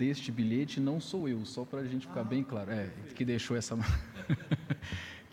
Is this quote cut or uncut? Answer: uncut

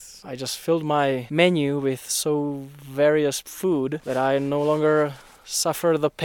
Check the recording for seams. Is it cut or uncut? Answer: uncut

